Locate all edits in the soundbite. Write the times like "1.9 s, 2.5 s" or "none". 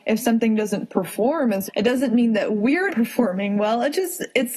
1.7 s, 2.9 s

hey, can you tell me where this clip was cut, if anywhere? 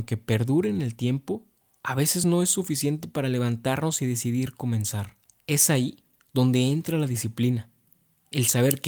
none

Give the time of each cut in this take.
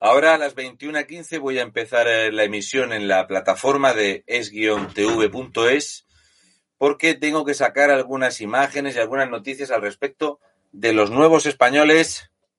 none

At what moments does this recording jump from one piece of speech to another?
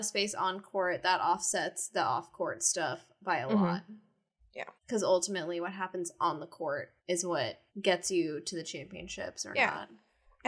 4.8 s, 7.0 s, 7.7 s

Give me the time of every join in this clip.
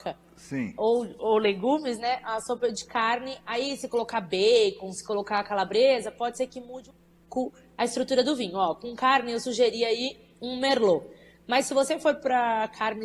none

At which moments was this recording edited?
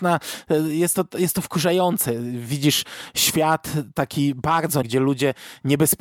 4.8 s

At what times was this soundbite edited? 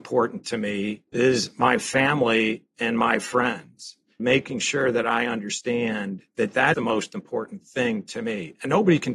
1.1 s, 4.2 s, 6.3 s, 6.7 s

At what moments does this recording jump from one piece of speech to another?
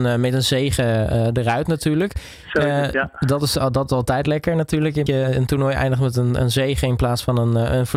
5.1 s

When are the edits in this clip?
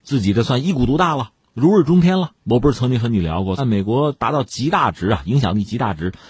1.4 s, 2.4 s, 3.6 s

